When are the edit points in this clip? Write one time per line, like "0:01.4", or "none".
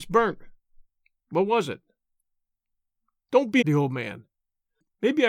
0:03.6

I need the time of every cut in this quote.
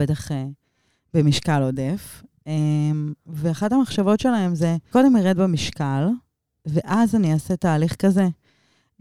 0:04.9

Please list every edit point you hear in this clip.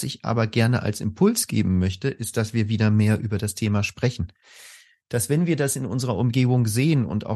none

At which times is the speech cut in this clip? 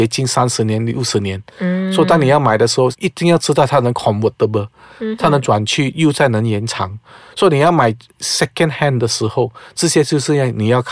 none

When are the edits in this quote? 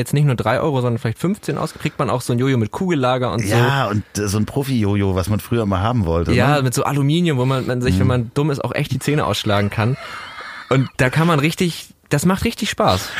0:10.9

